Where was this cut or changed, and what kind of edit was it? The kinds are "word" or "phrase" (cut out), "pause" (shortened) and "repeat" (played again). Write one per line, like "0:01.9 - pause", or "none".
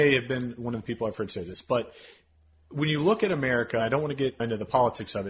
0:03.8 - word